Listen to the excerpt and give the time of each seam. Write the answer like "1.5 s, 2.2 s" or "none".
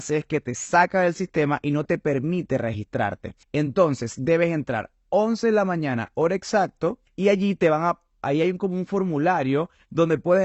3.4 s, 7.1 s